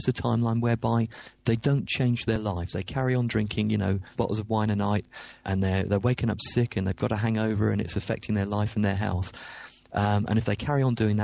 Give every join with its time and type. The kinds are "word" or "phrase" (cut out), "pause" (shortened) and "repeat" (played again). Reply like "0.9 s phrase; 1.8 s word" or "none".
4.1 s word; 5.4 s word